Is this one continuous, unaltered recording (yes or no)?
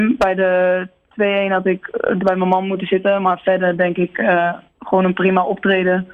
no